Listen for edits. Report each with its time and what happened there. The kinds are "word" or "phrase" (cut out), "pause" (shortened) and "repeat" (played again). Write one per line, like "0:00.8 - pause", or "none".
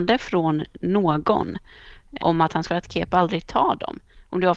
0:02.2 - word
0:02.7 - phrase